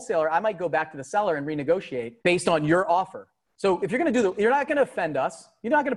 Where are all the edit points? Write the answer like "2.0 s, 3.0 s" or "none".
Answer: 2.2 s